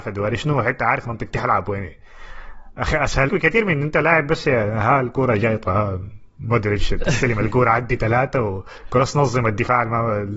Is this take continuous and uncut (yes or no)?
no